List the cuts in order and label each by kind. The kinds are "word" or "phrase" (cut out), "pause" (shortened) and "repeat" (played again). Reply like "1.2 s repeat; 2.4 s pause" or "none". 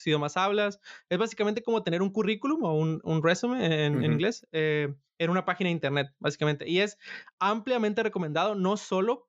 none

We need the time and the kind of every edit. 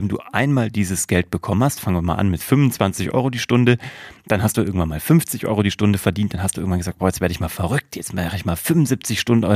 none

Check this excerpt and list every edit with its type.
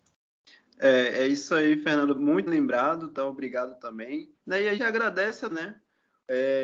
2.5 s word; 4.4 s pause; 4.8 s word; 5.5 s phrase

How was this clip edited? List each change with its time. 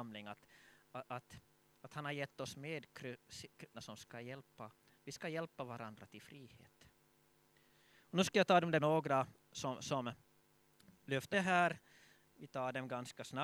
1.0 s word; 3.7 s word; 8.8 s word; 11.3 s word

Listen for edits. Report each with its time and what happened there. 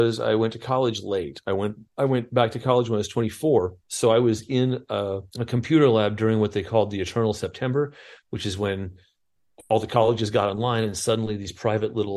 1.9 s pause; 3.8 s pause; 5.3 s pause

